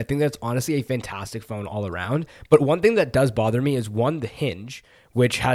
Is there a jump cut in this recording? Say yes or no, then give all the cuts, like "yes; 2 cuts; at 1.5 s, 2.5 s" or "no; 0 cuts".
no; 0 cuts